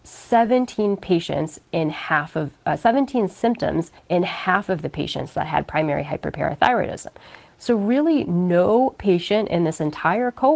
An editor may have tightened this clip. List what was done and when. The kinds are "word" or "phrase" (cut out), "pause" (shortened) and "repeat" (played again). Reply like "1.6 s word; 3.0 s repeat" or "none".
4.0 s pause